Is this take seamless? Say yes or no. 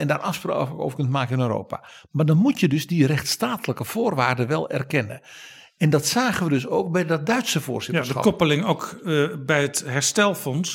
yes